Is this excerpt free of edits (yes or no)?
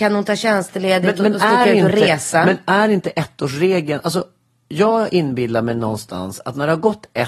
yes